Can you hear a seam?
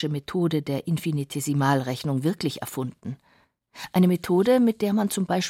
no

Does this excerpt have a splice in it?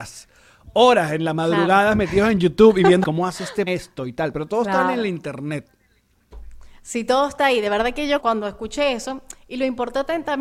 yes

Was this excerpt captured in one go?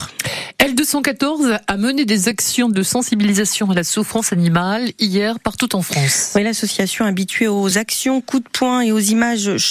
yes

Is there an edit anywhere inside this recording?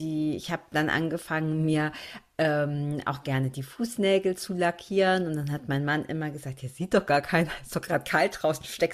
no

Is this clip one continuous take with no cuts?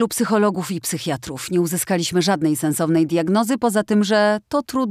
yes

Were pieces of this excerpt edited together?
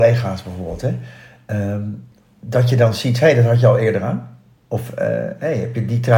yes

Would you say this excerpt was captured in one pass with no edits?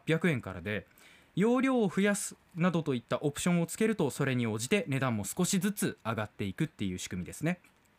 yes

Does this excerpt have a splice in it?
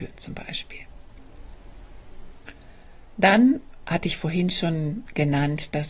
no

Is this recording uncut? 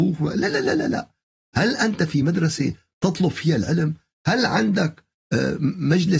yes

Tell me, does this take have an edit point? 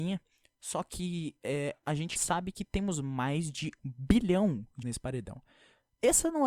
yes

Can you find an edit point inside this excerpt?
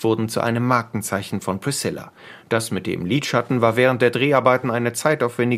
no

